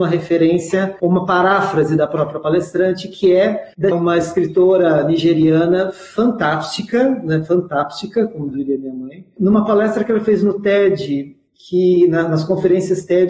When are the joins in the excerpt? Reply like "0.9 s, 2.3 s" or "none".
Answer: 3.9 s